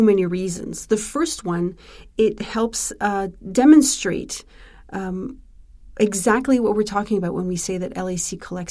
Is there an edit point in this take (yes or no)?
no